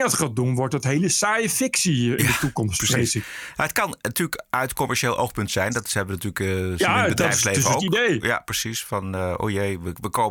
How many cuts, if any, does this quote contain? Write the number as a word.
zero